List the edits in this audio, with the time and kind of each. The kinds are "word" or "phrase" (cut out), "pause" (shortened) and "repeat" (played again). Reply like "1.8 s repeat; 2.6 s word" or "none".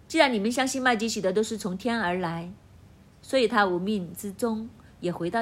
none